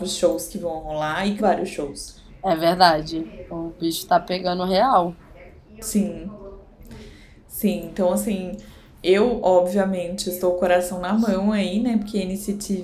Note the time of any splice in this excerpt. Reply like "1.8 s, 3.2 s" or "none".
1.4 s